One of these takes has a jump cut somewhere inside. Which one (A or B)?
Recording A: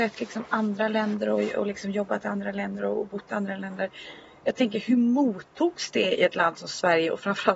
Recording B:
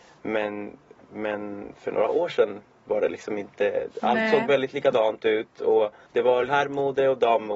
B